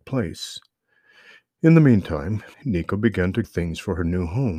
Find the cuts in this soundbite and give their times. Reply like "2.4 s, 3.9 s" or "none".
2.5 s, 3.4 s